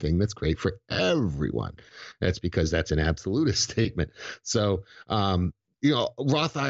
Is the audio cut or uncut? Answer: uncut